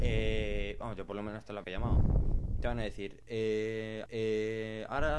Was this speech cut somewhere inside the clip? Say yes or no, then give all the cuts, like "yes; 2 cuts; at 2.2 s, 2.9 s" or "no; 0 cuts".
yes; 2 cuts; at 1.6 s, 4.1 s